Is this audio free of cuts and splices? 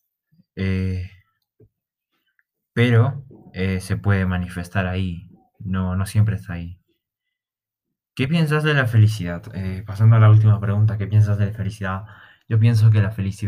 yes; 0 cuts

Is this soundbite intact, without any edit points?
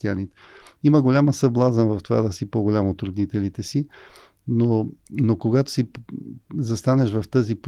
yes; 0 cuts

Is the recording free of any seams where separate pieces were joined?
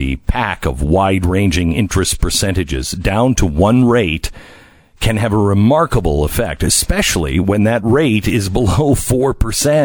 yes; 0 cuts

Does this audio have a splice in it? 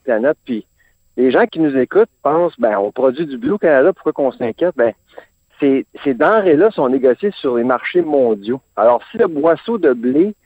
no; 0 cuts

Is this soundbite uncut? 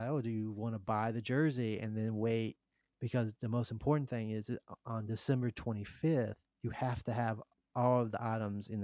yes; 0 cuts

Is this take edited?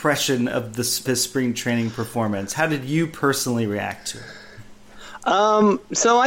yes; 1 cut; at 1.1 s

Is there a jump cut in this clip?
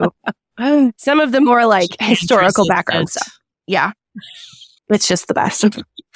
no; 0 cuts

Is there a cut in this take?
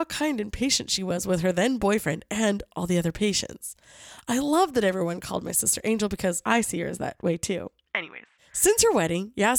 no; 0 cuts

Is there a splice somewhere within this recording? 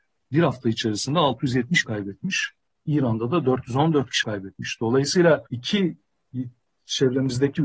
yes; 3 cuts; at 1.8 s, 4.2 s, 5.5 s

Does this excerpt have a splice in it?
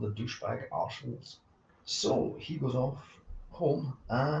no; 0 cuts

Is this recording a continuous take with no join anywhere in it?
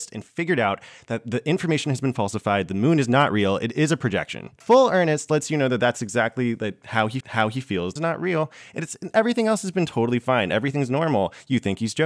no; 3 cuts; at 4.6 s, 7.2 s, 8.0 s

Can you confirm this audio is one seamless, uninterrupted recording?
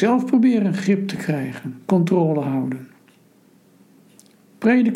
yes; 0 cuts

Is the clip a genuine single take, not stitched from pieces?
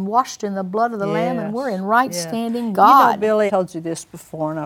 no; 2 cuts; at 2.7 s, 3.5 s

